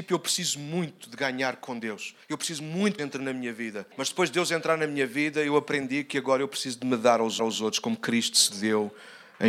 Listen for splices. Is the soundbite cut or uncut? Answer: cut